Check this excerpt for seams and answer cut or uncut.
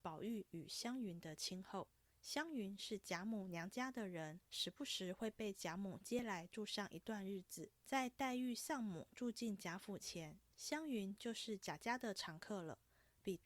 cut